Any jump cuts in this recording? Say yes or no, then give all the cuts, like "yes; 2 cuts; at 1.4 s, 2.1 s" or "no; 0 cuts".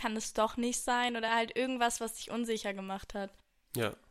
no; 0 cuts